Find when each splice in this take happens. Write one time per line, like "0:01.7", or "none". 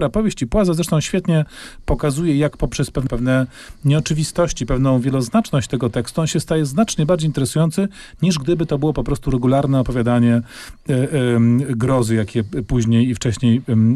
0:03.1